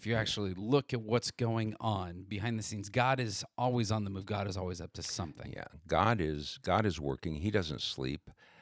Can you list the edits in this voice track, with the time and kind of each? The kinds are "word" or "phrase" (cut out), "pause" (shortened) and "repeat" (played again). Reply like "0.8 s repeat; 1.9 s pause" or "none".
none

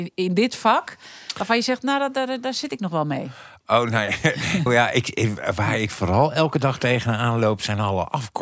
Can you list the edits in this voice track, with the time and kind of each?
4.7 s word

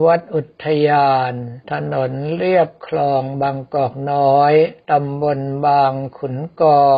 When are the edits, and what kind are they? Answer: 1.6 s pause; 4.8 s pause

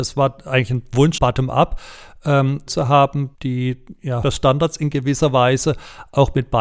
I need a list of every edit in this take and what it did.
1.2 s word; 2.7 s word; 3.3 s pause; 4.2 s phrase

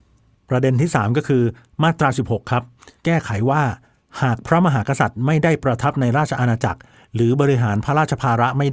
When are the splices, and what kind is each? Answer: 3.0 s pause

